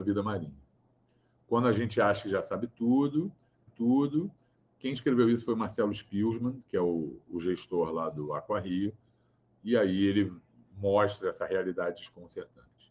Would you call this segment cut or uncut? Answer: cut